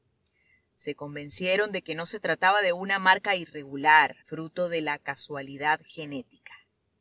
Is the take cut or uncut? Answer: cut